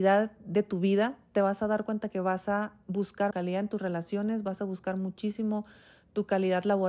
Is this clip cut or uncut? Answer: cut